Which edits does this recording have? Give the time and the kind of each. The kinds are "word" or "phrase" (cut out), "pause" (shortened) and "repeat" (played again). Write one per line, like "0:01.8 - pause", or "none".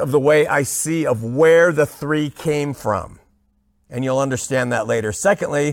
none